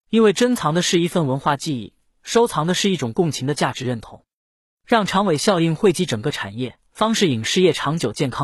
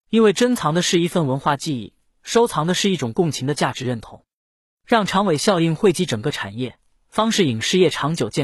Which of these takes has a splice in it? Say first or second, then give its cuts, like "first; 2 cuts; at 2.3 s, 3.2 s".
first; 1 cut; at 6.8 s